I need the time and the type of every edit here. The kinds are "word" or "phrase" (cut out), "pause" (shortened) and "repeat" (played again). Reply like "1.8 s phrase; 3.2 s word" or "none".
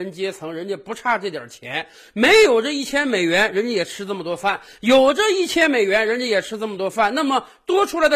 none